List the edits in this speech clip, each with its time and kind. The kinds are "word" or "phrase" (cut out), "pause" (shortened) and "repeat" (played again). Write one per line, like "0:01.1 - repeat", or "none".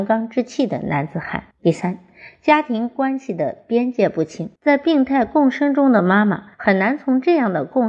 0:01.5 - pause
0:04.6 - pause
0:06.5 - pause